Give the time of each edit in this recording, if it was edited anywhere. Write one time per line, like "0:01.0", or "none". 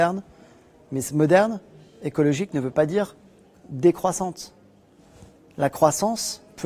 none